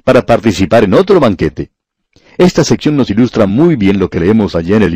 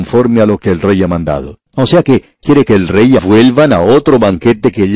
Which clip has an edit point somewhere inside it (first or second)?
second